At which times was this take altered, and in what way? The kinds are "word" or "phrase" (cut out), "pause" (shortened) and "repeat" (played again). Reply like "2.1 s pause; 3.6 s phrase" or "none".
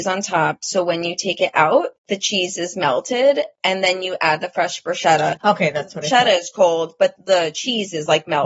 7.2 s word